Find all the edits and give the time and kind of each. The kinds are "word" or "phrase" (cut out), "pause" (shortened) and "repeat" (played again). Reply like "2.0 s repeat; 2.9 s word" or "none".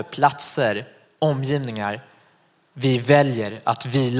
none